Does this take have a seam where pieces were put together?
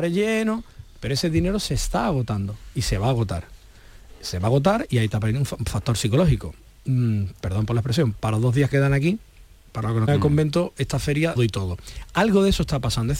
yes; 4 cuts; at 8.1 s, 8.7 s, 10.1 s, 11.4 s

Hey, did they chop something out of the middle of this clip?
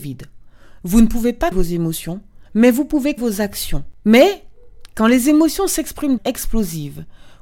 yes; 4 cuts; at 1.5 s, 2.5 s, 3.2 s, 6.2 s

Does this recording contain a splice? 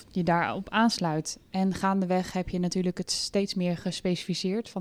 no; 0 cuts

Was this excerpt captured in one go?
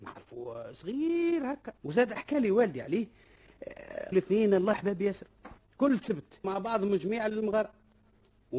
no; 5 cuts; at 1.8 s, 4.1 s, 4.7 s, 5.6 s, 6.4 s

